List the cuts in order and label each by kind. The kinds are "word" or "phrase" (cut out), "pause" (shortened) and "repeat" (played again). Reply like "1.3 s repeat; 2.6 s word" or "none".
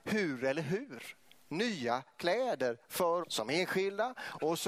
3.2 s word